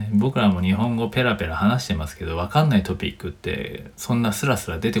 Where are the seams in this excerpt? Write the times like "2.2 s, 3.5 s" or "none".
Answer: 3.9 s